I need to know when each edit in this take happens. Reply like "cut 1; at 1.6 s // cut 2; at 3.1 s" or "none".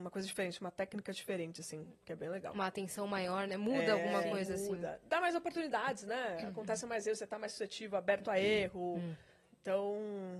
none